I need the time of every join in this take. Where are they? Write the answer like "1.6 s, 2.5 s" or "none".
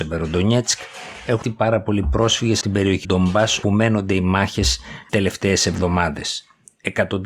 1.4 s, 2.6 s, 3.0 s, 3.6 s, 5.1 s